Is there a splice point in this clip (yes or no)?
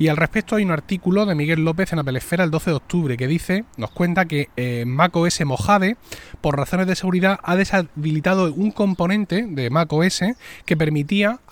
no